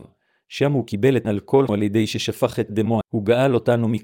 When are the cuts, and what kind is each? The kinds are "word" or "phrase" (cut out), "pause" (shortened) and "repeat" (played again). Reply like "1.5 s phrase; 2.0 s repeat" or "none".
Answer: 1.2 s word; 1.7 s word; 3.0 s word